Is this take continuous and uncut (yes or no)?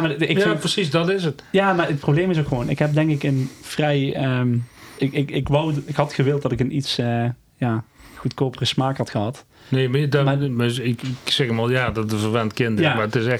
yes